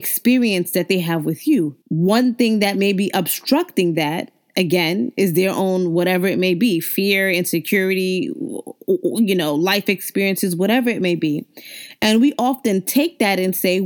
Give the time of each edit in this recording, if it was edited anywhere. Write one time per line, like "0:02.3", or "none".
0:01.8